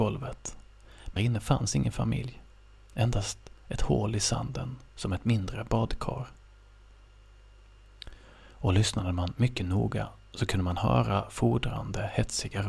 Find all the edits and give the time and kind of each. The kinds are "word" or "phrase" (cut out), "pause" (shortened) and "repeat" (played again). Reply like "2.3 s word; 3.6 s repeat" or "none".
1.2 s word; 4.9 s word